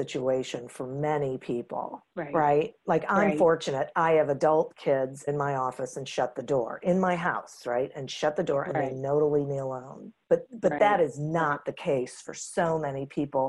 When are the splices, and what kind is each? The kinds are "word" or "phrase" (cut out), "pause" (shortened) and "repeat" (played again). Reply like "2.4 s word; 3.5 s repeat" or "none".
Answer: 2.1 s pause; 5.3 s phrase; 10.2 s pause